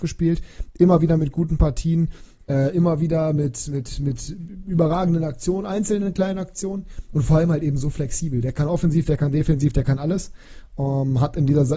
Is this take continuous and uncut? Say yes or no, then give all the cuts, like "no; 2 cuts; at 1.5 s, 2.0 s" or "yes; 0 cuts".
yes; 0 cuts